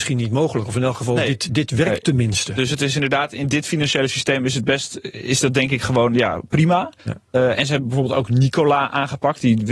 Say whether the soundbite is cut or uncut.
cut